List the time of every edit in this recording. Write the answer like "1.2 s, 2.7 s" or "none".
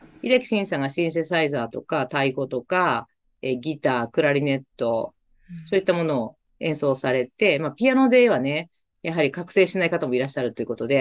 none